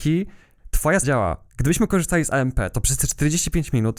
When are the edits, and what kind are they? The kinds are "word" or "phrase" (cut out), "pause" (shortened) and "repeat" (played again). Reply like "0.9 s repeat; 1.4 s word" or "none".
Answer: 1.0 s word